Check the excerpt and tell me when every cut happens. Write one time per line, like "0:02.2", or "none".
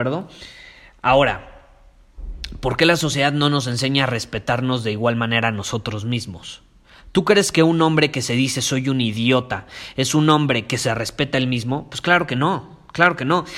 none